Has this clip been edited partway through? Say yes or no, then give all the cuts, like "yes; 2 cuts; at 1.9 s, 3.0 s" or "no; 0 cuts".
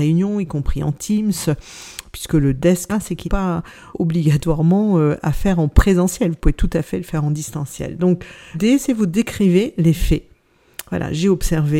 yes; 4 cuts; at 2.9 s, 3.2 s, 3.9 s, 8.5 s